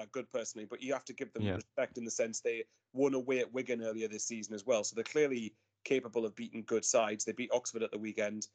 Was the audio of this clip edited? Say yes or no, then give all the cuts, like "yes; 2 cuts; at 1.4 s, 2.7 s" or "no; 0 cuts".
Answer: no; 0 cuts